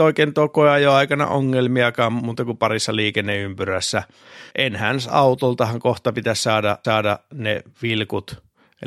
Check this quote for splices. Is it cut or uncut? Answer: cut